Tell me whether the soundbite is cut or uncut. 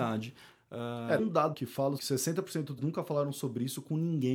cut